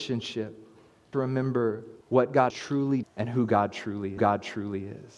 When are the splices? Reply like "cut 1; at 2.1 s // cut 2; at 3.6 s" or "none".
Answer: cut 1; at 1.1 s // cut 2; at 2.0 s // cut 3; at 2.5 s // cut 4; at 3.0 s // cut 5; at 4.2 s